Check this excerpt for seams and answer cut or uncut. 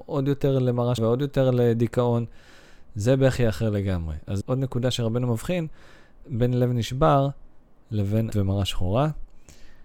cut